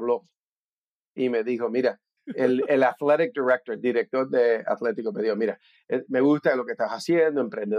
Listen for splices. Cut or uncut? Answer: uncut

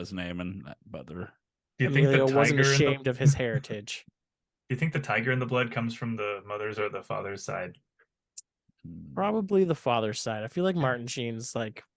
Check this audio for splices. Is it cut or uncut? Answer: uncut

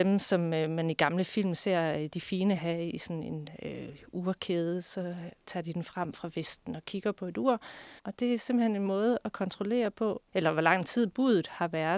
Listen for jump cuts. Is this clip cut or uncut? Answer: cut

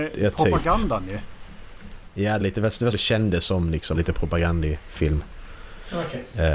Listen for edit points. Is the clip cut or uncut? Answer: cut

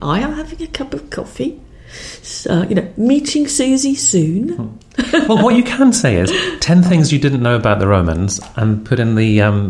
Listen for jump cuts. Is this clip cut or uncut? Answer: uncut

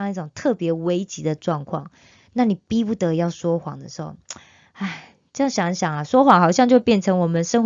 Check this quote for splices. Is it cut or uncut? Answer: uncut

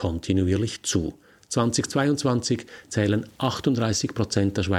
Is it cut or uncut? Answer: uncut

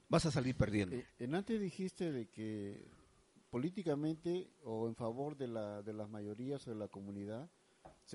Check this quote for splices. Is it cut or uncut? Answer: uncut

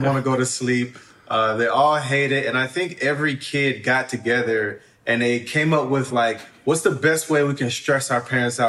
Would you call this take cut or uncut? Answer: uncut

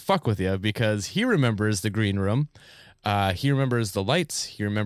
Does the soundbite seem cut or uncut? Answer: uncut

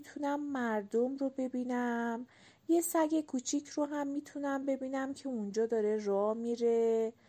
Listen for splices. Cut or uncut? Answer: uncut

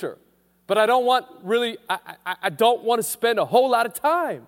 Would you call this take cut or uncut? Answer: uncut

